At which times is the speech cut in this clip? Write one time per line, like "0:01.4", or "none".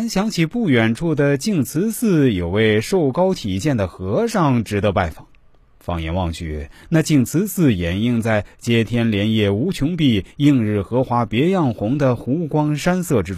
none